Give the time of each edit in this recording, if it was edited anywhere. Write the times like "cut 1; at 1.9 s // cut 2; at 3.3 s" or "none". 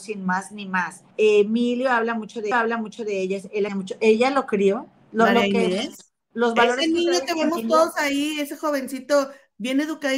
cut 1; at 1.1 s // cut 2; at 2.5 s // cut 3; at 3.7 s // cut 4; at 6.2 s